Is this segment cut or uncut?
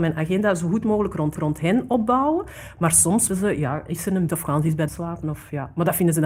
cut